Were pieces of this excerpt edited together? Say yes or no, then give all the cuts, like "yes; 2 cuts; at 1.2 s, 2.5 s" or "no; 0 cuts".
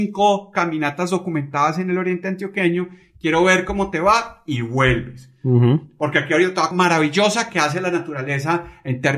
yes; 1 cut; at 6.7 s